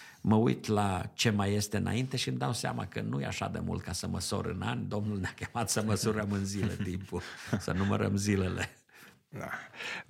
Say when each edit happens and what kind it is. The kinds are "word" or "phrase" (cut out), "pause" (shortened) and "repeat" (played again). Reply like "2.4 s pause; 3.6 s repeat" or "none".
none